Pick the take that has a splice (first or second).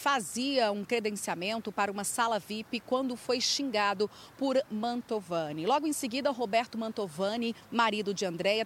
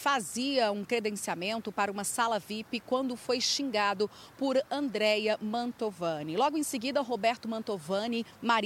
first